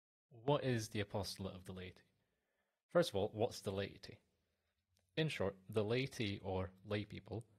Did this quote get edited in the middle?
no; 0 cuts

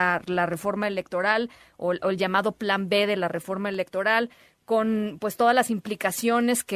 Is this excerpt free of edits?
yes; 0 cuts

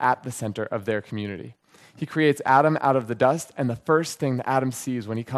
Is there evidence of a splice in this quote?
no; 0 cuts

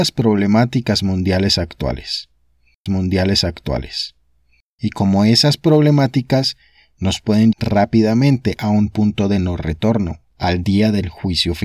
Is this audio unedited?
no; 3 cuts; at 2.9 s, 7.5 s, 10.3 s

